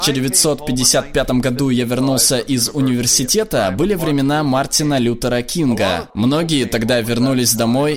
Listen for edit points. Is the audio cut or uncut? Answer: uncut